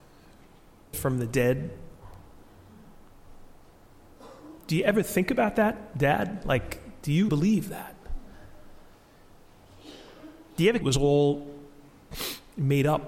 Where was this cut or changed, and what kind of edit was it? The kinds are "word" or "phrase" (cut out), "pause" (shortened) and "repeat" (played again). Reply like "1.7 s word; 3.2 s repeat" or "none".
0.9 s word; 7.3 s word; 10.8 s phrase